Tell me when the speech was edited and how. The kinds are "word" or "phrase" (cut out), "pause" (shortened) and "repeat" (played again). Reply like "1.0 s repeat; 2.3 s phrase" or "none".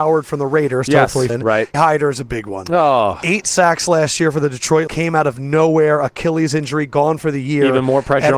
1.3 s word; 1.7 s word; 4.9 s word